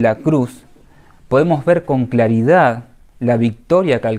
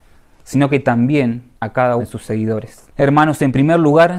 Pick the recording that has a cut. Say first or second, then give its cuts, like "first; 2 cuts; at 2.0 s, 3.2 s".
second; 3 cuts; at 1.5 s, 2.0 s, 2.9 s